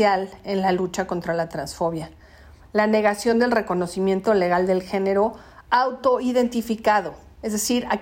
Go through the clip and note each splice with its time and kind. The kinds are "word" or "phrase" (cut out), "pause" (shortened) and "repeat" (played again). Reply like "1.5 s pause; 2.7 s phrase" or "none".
none